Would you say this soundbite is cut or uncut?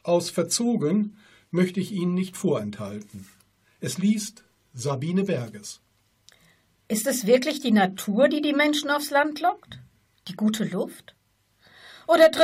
uncut